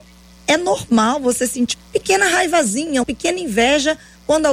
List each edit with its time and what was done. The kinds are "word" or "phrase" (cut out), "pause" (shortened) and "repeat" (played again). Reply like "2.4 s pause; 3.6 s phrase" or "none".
1.7 s word; 3.0 s word